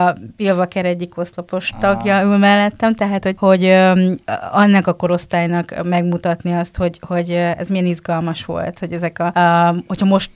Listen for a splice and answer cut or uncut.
uncut